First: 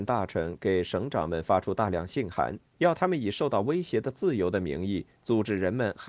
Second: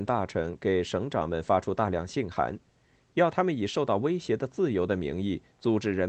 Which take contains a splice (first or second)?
first